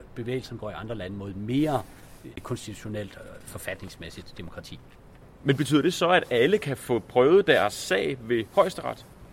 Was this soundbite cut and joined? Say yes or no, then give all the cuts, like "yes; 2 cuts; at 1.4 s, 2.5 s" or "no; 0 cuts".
no; 0 cuts